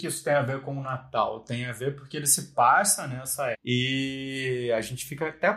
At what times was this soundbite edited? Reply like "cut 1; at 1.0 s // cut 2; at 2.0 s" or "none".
cut 1; at 3.5 s